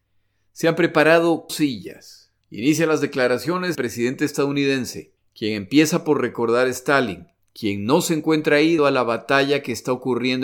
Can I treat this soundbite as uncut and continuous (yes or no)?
no